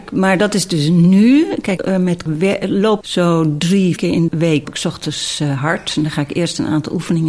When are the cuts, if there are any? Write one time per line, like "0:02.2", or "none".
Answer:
0:01.8
0:02.3
0:03.0
0:04.0
0:04.3
0:04.6